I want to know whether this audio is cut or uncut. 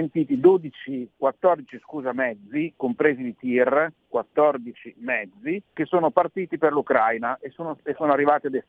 cut